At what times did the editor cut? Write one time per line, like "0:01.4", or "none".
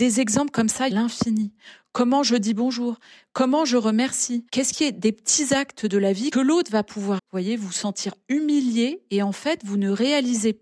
0:00.9
0:04.5
0:06.3
0:07.2